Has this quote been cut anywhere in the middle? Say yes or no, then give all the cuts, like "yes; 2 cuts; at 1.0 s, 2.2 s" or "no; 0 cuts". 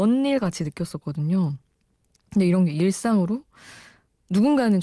no; 0 cuts